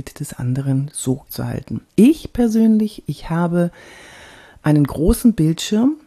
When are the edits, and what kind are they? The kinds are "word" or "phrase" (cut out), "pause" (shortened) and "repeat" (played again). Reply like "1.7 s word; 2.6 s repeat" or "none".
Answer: 1.3 s phrase; 1.9 s pause

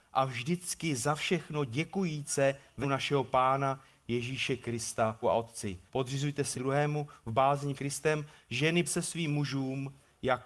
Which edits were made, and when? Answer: 2.8 s word; 5.2 s word; 5.9 s pause; 6.5 s word; 7.8 s word; 8.9 s word

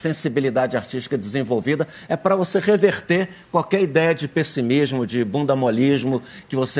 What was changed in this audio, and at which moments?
none

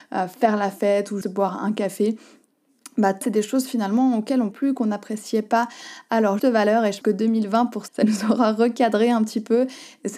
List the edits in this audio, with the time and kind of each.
1.2 s word; 3.2 s word; 4.5 s word; 6.4 s word; 7.0 s word; 7.9 s word

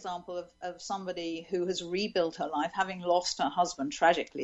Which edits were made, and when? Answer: none

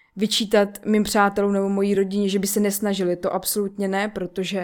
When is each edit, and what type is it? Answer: none

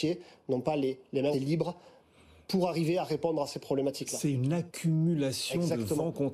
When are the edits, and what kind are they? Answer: 1.3 s word

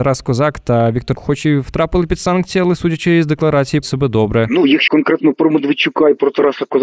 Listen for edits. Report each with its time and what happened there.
1.1 s word; 3.8 s word; 4.9 s word

